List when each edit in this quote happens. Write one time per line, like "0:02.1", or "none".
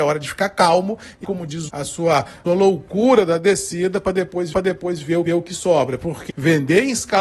0:01.2
0:01.7
0:02.5
0:04.5
0:05.3
0:06.3